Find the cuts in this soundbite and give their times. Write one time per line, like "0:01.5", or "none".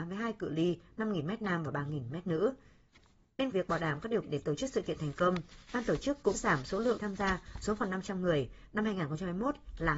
0:03.5
0:04.2
0:06.3
0:07.0